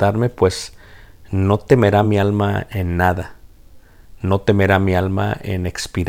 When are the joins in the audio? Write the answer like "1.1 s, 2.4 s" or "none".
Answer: none